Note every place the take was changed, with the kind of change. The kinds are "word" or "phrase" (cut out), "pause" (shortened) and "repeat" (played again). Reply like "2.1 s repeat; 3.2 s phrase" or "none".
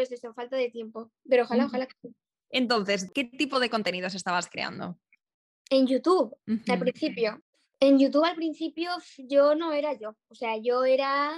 6.4 s pause